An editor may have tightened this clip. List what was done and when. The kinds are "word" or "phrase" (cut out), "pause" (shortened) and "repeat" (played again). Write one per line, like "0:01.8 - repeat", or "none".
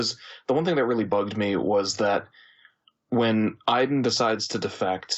none